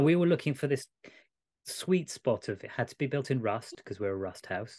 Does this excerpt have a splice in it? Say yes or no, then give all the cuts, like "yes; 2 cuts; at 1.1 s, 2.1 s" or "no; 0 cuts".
no; 0 cuts